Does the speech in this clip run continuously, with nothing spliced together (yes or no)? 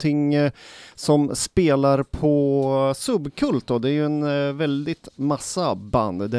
yes